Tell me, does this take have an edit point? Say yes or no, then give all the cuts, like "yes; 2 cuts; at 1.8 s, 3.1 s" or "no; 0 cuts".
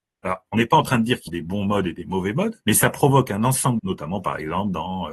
yes; 3 cuts; at 1.3 s, 2.6 s, 3.8 s